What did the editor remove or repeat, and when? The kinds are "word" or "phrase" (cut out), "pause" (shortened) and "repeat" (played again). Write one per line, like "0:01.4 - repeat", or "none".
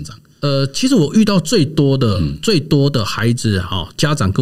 none